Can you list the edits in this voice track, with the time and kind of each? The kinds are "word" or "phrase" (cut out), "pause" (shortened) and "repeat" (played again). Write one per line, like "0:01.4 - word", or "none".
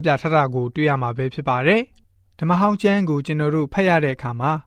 none